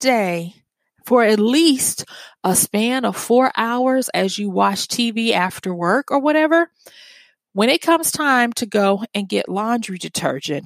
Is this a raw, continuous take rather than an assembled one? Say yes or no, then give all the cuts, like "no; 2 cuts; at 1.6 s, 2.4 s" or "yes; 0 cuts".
yes; 0 cuts